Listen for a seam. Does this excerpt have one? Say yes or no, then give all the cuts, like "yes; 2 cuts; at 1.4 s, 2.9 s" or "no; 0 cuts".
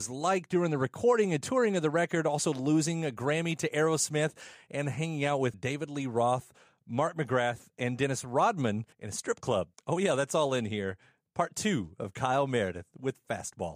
yes; 2 cuts; at 5.5 s, 8.9 s